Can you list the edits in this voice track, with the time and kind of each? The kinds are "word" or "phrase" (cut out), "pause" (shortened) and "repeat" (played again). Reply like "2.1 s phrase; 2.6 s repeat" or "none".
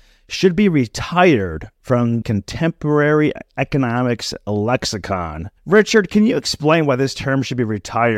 2.2 s word; 5.6 s pause